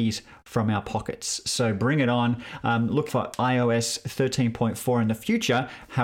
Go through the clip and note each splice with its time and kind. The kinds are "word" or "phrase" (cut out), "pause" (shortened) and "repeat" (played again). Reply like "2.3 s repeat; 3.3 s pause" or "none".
3.1 s word